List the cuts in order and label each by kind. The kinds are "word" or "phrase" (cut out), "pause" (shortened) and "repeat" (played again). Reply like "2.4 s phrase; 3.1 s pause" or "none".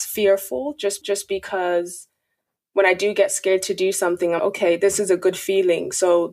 1.0 s repeat; 4.4 s word